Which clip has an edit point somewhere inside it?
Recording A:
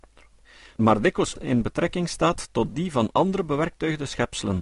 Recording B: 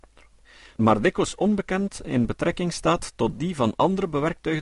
A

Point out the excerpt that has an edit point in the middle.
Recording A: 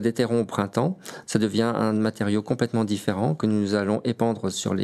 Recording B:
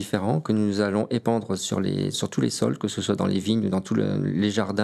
B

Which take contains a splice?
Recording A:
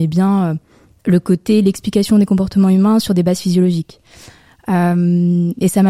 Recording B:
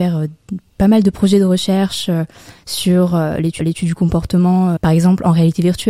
B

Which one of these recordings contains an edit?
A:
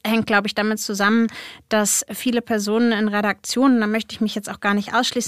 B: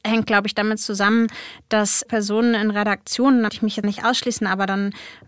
B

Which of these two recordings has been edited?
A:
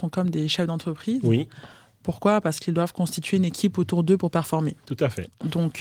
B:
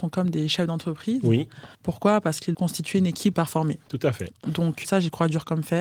B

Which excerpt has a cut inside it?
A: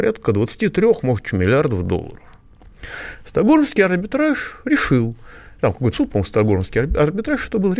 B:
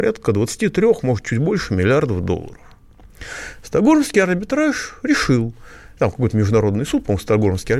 A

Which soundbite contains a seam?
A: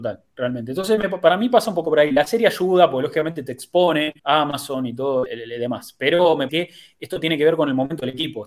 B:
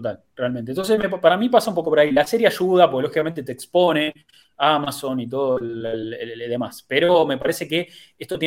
A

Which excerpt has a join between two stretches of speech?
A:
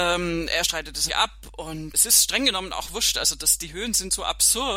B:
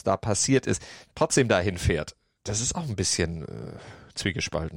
A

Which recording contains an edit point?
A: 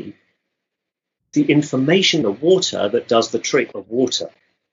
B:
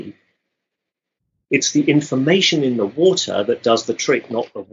A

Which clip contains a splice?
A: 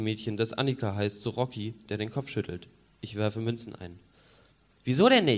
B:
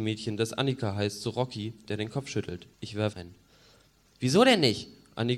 B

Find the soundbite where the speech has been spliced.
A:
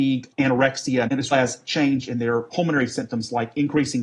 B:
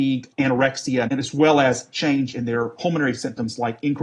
A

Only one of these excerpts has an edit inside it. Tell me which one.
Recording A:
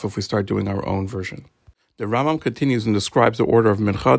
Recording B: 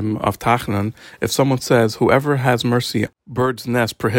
B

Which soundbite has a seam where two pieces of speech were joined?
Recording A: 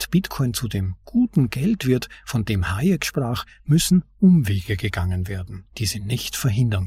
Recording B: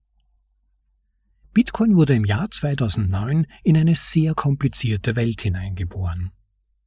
A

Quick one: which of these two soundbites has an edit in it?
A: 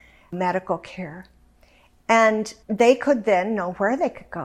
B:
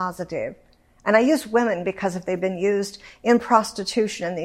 A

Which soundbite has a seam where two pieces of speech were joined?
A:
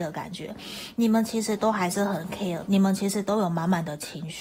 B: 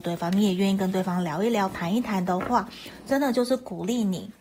A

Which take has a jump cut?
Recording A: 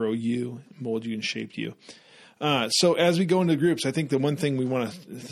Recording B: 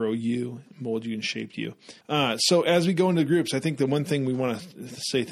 B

